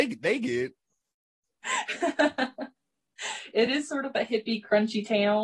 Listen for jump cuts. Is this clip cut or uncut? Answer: uncut